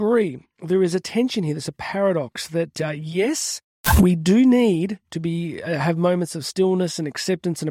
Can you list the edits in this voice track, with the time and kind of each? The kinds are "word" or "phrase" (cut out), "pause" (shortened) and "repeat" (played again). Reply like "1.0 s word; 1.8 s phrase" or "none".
none